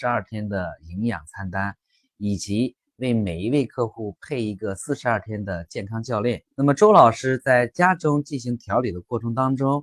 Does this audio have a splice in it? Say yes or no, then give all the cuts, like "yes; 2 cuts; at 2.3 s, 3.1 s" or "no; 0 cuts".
yes; 1 cut; at 6.5 s